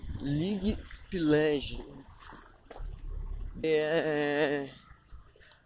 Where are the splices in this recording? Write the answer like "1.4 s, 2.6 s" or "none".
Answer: 1.1 s, 3.6 s